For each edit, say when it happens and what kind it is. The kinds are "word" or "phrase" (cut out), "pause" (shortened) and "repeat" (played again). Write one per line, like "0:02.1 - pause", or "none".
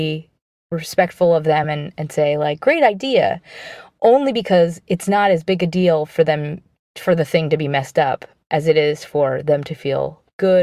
none